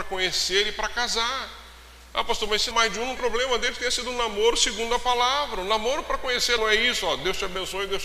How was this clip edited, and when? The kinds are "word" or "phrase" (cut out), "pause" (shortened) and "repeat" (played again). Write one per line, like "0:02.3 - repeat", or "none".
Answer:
0:02.7 - word
0:03.2 - word
0:06.6 - word